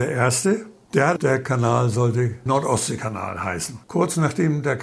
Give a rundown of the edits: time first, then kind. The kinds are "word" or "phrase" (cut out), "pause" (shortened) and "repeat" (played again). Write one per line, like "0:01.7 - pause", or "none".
0:01.2 - word
0:03.8 - pause